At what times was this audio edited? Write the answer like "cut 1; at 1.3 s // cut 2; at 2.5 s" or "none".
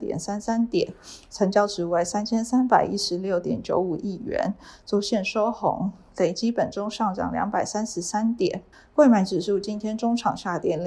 cut 1; at 8.7 s